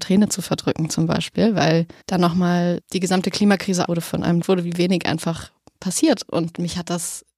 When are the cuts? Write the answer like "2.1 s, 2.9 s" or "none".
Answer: 2.0 s, 2.8 s, 3.9 s, 4.4 s